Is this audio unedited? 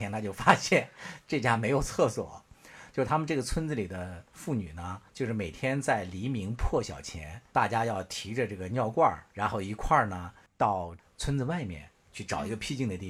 no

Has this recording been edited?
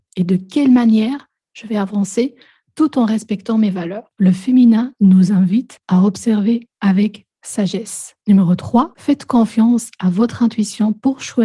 no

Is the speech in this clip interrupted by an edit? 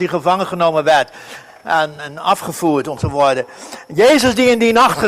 yes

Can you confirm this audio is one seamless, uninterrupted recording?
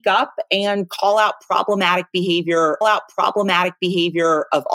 no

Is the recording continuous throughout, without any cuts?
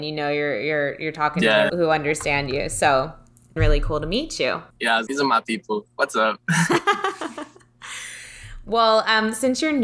no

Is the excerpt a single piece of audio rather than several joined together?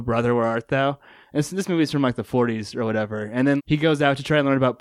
no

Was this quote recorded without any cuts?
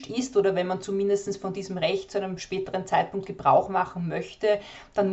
yes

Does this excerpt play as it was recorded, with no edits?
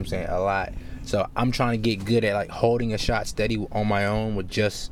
yes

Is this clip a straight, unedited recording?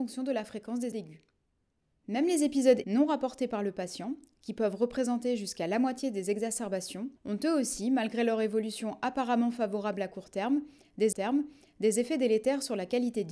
no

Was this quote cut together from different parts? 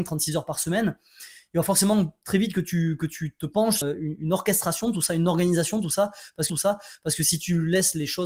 yes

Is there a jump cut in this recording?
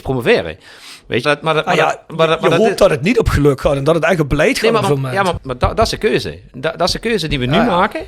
yes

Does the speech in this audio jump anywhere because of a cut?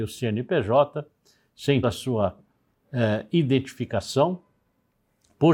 yes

